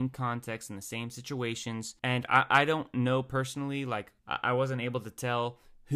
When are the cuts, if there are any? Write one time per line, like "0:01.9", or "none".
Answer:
0:02.0
0:04.2